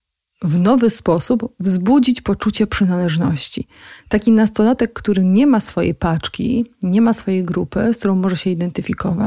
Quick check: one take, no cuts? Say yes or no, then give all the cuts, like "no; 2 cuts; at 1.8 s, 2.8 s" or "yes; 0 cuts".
yes; 0 cuts